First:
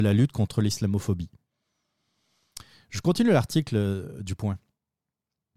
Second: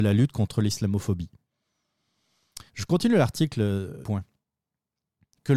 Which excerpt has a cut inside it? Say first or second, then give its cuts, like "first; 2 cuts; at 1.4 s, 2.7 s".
second; 2 cuts; at 2.7 s, 4.0 s